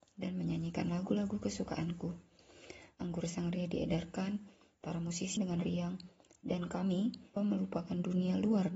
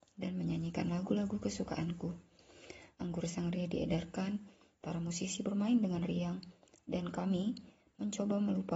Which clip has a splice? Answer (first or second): first